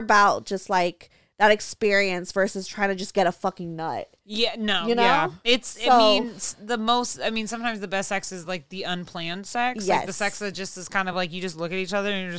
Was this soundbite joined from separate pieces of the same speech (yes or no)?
no